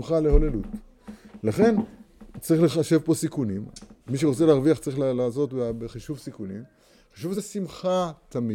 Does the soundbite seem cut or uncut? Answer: cut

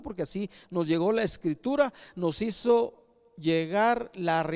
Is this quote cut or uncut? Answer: uncut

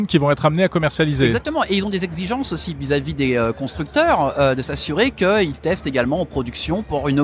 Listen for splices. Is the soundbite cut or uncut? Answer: uncut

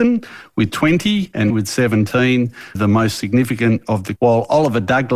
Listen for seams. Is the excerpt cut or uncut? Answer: cut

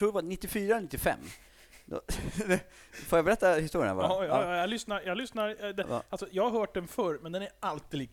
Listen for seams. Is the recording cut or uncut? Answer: uncut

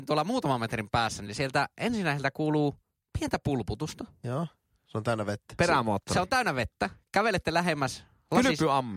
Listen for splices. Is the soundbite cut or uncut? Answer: uncut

